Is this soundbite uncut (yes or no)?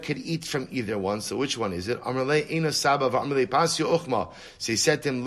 yes